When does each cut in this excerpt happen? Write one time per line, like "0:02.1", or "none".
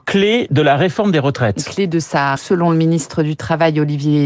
0:02.4